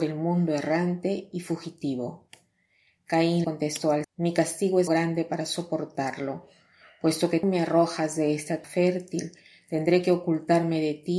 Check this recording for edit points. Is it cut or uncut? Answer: cut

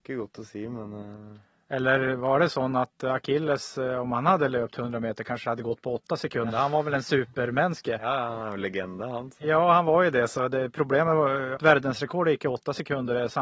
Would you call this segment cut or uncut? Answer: cut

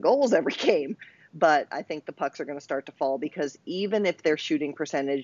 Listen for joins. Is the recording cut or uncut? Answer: uncut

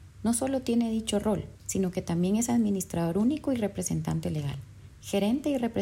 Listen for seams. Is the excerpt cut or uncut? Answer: uncut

